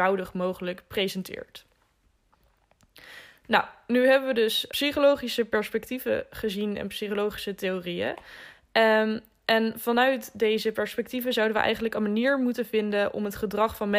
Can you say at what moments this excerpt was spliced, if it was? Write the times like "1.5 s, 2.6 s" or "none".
4.7 s